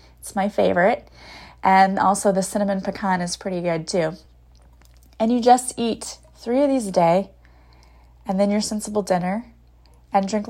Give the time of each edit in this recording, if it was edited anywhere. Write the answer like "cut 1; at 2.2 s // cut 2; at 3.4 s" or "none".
none